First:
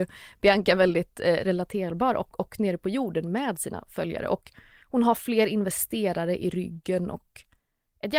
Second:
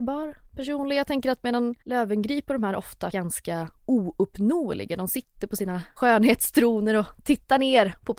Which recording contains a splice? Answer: second; 3 cuts; at 1.8 s, 3.1 s, 6.0 s

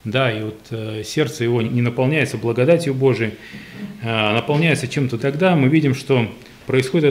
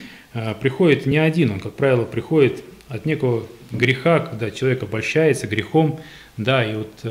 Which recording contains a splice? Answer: first; 2 cuts; at 1.6 s, 5.2 s

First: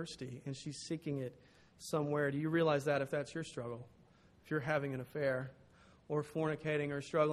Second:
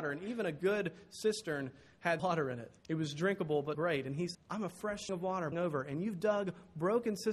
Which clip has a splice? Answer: second; 6 cuts; at 2.2 s, 2.8 s, 3.7 s, 4.3 s, 5.1 s, 5.5 s

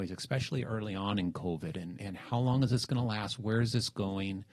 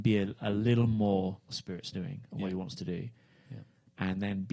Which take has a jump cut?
second; 1 cut; at 1.5 s

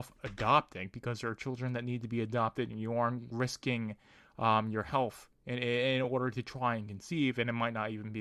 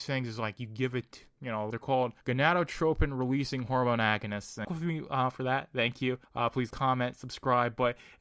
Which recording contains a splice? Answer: second; 5 cuts; at 1.7 s, 2.2 s, 4.6 s, 6.2 s, 6.7 s

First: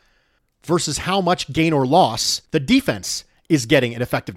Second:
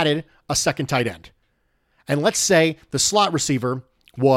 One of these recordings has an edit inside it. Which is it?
first; 1 cut; at 2.5 s

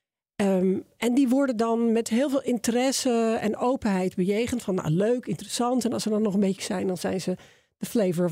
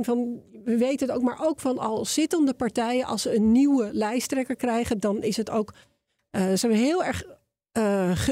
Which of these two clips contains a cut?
first; 1 cut; at 6.6 s

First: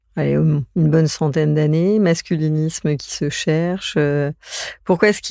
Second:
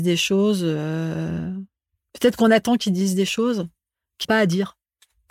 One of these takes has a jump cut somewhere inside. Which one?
second; 1 cut; at 4.2 s

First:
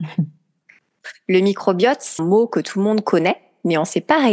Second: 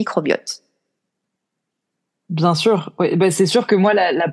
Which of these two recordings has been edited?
first; 1 cut; at 2.2 s

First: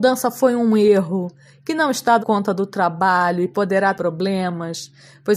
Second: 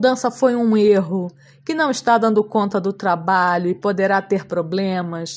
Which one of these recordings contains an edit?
first; 2 cuts; at 2.2 s, 3.9 s

